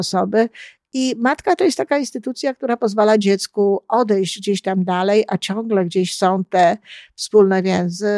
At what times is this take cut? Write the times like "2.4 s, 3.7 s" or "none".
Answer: none